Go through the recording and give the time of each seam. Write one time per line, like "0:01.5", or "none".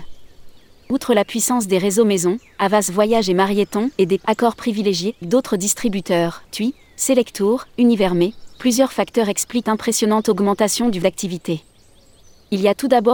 0:03.9
0:05.2
0:06.4
0:09.6
0:11.0